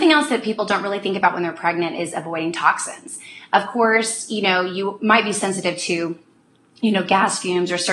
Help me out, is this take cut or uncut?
uncut